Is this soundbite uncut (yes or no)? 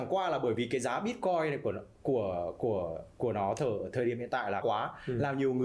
no